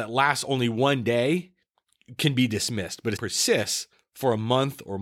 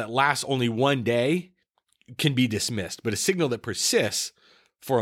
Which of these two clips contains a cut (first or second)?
first